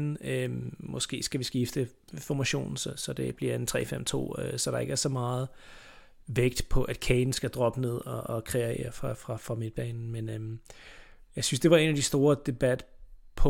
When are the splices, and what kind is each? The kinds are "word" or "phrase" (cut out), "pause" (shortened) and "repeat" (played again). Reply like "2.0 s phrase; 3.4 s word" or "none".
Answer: none